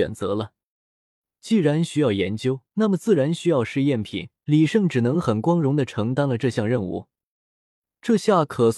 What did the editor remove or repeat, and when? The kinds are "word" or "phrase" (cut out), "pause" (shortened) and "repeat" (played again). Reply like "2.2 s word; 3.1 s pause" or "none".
2.7 s pause; 4.4 s pause